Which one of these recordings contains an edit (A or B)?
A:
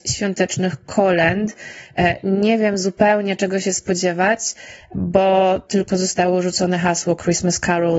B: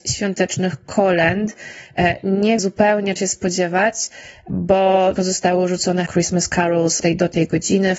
B